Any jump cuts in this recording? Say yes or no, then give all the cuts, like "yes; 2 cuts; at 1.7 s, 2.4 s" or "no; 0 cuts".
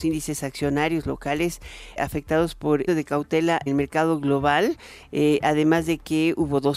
yes; 3 cuts; at 2.0 s, 2.9 s, 3.7 s